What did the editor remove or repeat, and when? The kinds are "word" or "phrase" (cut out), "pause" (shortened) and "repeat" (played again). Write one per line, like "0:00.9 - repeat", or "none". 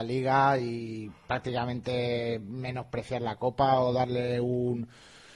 none